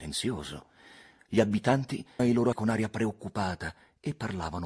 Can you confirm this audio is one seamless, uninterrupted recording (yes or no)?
no